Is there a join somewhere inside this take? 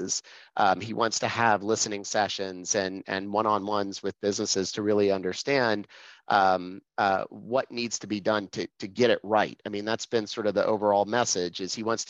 yes; 1 cut; at 6.9 s

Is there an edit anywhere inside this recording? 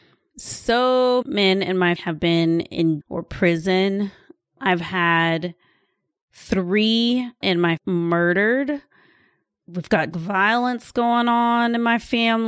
yes; 6 cuts; at 1.2 s, 2.0 s, 3.0 s, 7.4 s, 7.8 s, 10.1 s

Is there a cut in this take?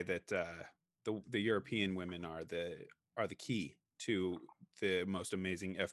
no; 0 cuts

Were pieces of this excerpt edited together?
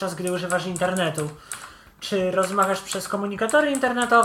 no; 0 cuts

